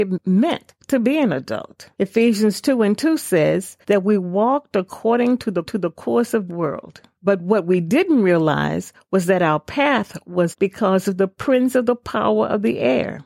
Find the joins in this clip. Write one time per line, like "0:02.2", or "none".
0:01.9
0:03.8
0:05.7
0:06.5
0:10.5